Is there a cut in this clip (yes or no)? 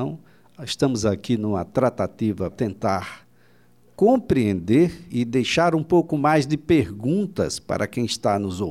yes